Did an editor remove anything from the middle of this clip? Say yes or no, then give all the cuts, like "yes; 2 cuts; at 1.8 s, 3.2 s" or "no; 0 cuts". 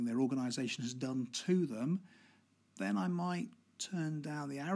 no; 0 cuts